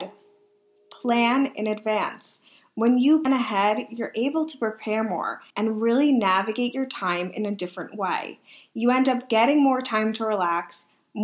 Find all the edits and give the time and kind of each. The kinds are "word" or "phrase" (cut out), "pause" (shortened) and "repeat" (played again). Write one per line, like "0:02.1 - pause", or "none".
0:03.3 - word
0:05.5 - pause